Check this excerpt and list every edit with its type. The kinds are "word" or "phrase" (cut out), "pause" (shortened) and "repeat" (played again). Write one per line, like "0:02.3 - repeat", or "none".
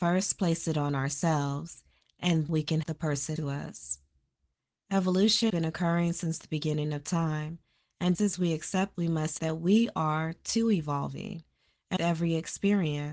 0:02.5 - word
0:02.8 - word
0:03.4 - word
0:05.5 - word
0:08.1 - word
0:08.9 - word
0:09.4 - word
0:12.0 - word